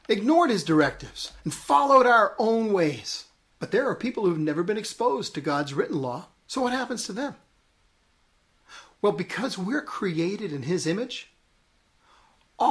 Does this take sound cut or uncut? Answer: cut